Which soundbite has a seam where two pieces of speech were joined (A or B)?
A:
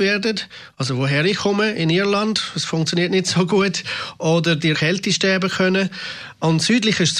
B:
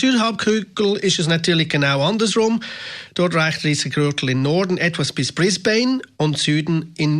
A